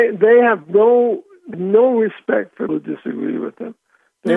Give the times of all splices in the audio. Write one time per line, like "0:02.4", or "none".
0:01.5
0:02.7

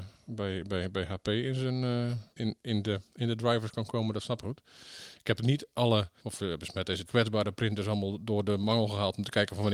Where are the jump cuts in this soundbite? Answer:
0:02.4
0:04.4
0:06.2
0:07.1

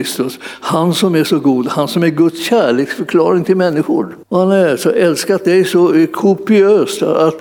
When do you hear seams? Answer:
0:04.2

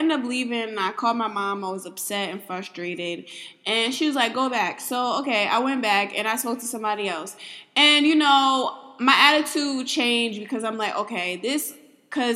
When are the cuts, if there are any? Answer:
none

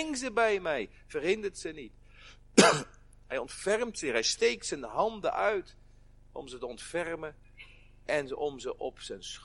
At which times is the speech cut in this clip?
none

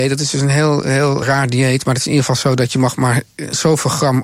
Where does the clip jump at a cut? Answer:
0:01.2

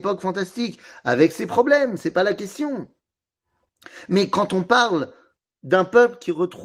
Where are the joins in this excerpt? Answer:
none

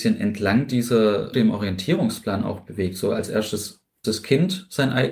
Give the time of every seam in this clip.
0:01.3
0:04.0

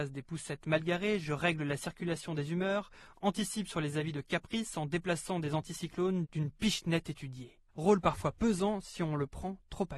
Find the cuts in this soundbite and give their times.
0:07.7

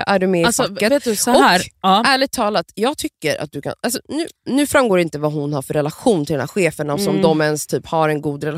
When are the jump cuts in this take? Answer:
none

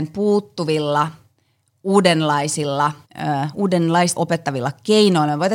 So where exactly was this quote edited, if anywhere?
0:03.0
0:04.2

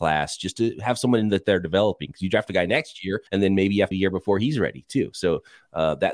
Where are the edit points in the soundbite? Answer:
0:03.3
0:03.9

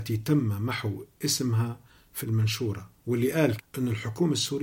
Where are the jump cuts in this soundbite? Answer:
0:01.1
0:02.2
0:03.0
0:03.6

